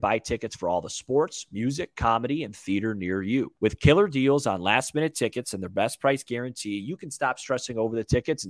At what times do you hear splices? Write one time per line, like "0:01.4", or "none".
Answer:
0:03.6